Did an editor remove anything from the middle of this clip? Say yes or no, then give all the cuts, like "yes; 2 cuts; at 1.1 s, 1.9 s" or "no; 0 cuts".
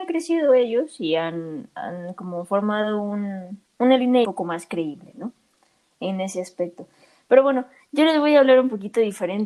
yes; 1 cut; at 4.2 s